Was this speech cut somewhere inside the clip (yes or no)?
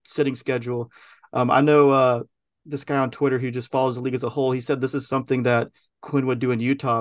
no